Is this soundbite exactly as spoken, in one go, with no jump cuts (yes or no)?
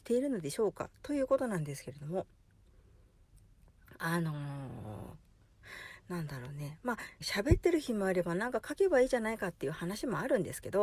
no